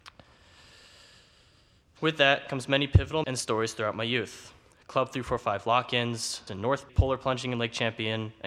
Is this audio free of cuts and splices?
no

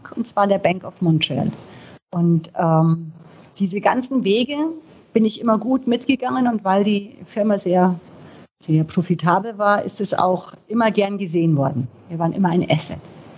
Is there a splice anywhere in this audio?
no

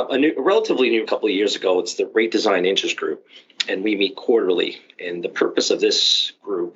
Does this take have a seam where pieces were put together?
yes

